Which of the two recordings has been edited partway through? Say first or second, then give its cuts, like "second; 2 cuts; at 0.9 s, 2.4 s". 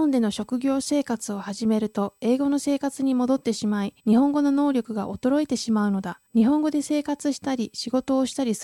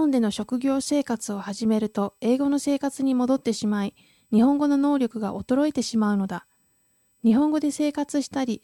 first; 2 cuts; at 4.0 s, 6.3 s